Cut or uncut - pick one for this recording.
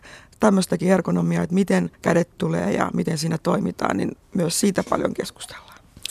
cut